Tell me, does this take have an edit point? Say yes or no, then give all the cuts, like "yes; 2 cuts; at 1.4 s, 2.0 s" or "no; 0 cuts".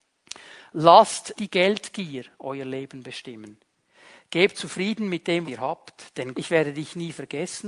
yes; 4 cuts; at 1.4 s, 4.5 s, 5.5 s, 6.3 s